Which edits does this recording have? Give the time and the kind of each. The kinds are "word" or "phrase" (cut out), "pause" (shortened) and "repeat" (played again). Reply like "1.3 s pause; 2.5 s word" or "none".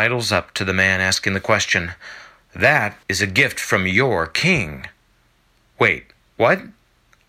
3.0 s pause